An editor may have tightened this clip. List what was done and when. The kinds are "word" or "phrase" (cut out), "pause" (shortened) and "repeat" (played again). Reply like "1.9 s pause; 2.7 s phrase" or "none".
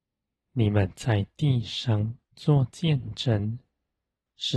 2.2 s pause